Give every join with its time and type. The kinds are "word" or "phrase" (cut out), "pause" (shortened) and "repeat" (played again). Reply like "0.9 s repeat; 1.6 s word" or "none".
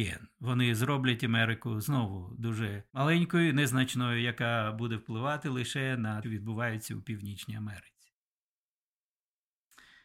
2.9 s pause; 6.2 s phrase